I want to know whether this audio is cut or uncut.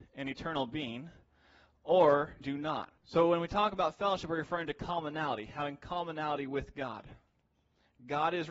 cut